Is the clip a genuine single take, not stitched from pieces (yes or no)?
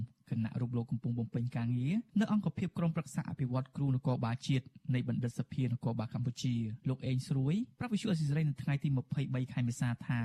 no